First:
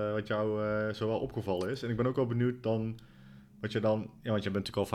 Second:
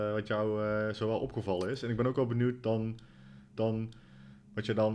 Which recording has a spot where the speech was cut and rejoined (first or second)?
second